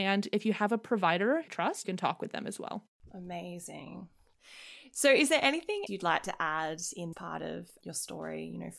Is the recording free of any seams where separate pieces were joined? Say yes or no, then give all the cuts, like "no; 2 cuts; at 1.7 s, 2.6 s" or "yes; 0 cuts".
no; 4 cuts; at 1.5 s, 1.8 s, 5.9 s, 7.1 s